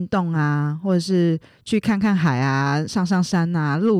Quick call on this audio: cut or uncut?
uncut